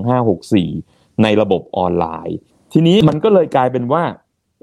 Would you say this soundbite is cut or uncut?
uncut